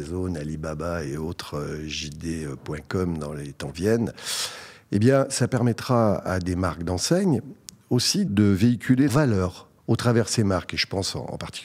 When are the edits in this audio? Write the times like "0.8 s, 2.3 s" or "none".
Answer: 3.7 s, 8.3 s, 9.1 s, 9.8 s